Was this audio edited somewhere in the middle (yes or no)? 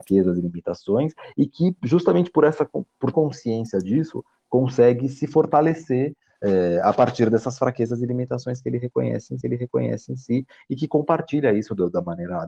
yes